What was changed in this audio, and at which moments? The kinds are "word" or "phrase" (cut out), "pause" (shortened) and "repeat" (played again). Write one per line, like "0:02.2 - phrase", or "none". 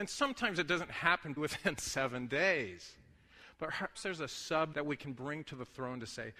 0:01.4 - word
0:03.9 - word
0:04.7 - word